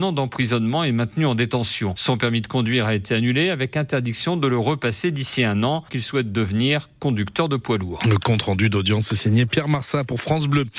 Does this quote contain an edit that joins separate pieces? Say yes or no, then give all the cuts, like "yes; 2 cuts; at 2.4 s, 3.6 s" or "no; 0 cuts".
yes; 1 cut; at 5.9 s